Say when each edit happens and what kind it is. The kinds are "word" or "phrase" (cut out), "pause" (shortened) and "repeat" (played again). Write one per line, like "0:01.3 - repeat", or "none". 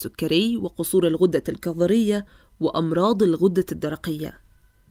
none